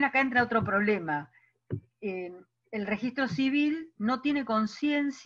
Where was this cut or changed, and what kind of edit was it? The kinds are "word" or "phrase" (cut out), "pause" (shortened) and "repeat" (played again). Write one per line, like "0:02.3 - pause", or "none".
none